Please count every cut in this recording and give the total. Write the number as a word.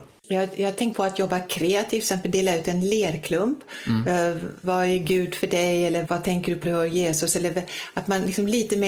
three